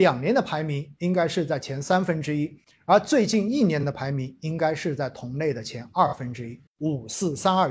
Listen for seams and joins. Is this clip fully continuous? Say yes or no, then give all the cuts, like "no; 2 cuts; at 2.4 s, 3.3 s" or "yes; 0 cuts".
no; 1 cut; at 6.7 s